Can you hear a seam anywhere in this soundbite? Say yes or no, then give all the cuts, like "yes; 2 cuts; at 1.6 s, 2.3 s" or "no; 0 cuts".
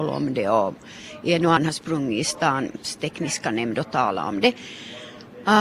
yes; 1 cut; at 1.6 s